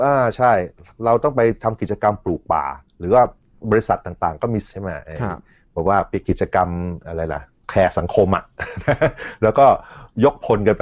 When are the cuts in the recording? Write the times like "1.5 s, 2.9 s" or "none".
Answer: 4.7 s